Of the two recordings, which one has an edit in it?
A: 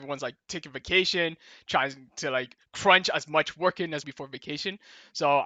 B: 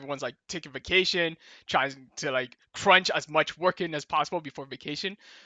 A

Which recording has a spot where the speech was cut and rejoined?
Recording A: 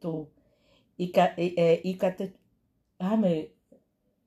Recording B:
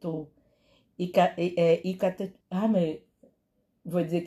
B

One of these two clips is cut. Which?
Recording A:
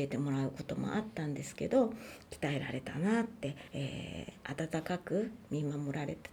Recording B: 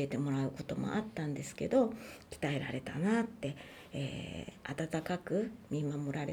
A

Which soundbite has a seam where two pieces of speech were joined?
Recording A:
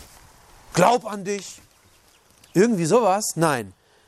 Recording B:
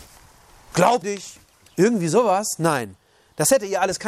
B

